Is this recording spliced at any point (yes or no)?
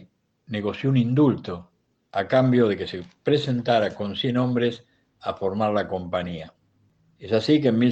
no